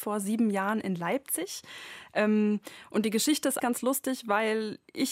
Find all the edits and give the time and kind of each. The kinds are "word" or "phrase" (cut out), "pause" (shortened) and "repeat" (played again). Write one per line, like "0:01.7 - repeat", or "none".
0:03.6 - word